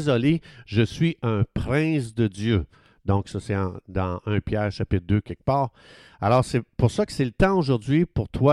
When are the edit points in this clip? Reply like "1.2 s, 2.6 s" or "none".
none